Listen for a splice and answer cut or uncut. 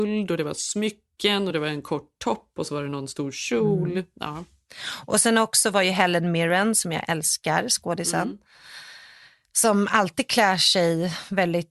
uncut